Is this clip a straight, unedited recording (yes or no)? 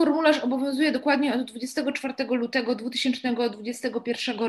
yes